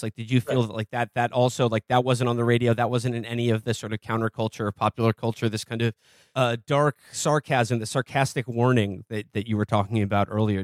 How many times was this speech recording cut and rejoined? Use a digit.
0